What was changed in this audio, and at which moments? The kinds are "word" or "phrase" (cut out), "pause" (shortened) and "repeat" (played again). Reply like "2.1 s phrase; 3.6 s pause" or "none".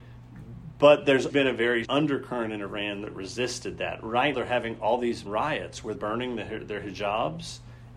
1.3 s word; 1.8 s word; 4.3 s word; 5.3 s word; 5.9 s word

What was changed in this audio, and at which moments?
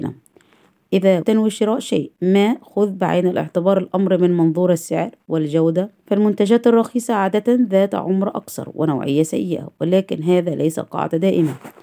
1.2 s word; 2.1 s pause; 6.0 s pause

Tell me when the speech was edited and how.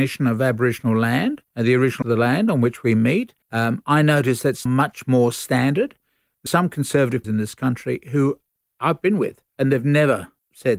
1.5 s pause; 2.0 s word; 3.4 s pause; 4.7 s word; 6.5 s word; 7.2 s word; 9.5 s pause

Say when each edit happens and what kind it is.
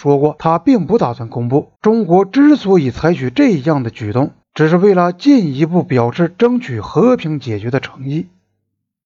1.8 s pause; 4.4 s pause

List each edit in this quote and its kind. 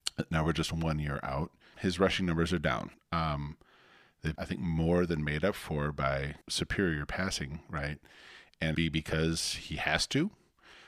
1.7 s word; 2.9 s pause; 4.4 s word; 6.4 s pause; 8.7 s phrase

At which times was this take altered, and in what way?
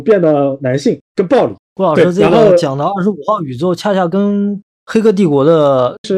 1.6 s pause

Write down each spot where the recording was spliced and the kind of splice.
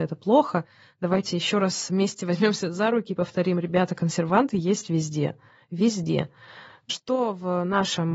none

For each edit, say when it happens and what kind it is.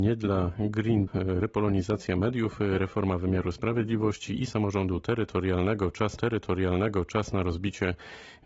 1.1 s word; 2.8 s word; 6.2 s repeat

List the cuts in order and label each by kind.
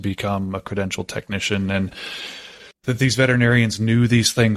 2.7 s pause

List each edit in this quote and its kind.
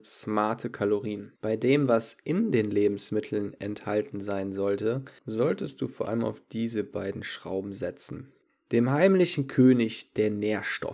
1.4 s pause; 5.2 s pause; 8.4 s pause

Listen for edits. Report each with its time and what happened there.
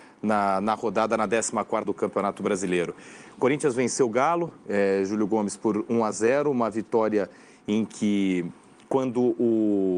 1.8 s word

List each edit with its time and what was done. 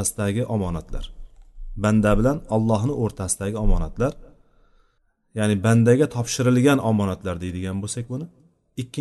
none

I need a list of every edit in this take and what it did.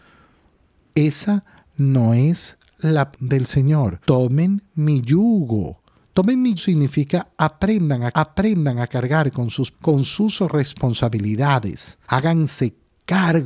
3.1 s word; 4.0 s pause; 6.0 s pause; 6.6 s word; 8.1 s repeat; 9.7 s word; 12.0 s pause

